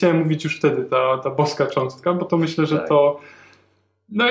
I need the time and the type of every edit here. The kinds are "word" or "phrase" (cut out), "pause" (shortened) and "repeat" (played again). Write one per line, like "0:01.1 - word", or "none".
none